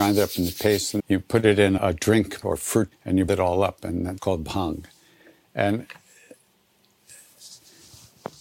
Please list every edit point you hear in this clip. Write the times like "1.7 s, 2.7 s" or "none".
1.0 s, 1.8 s, 2.4 s, 2.9 s, 3.3 s, 4.2 s